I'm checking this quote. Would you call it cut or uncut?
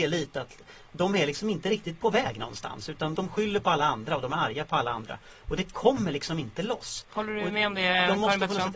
cut